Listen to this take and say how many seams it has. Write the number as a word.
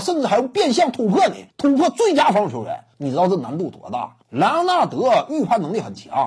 three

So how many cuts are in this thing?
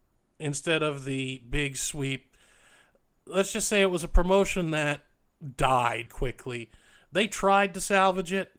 one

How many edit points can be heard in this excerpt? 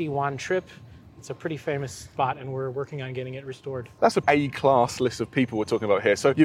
one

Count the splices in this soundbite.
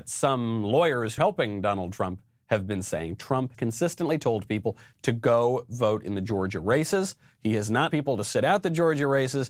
three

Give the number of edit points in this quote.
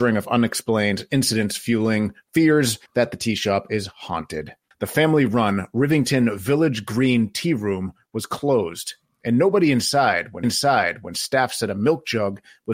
three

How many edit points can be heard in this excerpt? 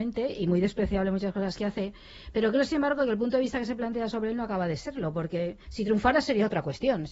one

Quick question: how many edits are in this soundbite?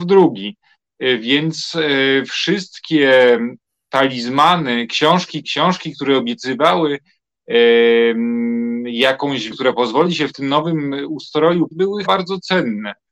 five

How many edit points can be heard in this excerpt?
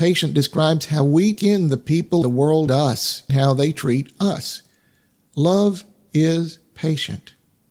four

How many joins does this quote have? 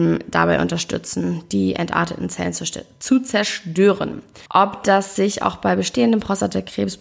one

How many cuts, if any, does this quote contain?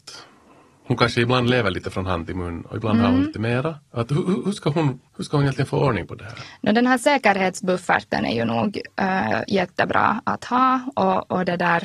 one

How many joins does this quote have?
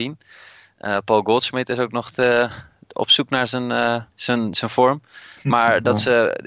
one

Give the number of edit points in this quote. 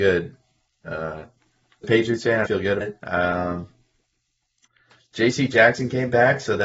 three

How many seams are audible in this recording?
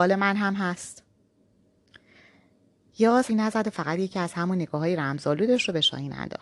one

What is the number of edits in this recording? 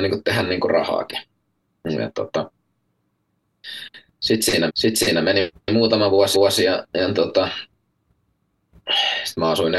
two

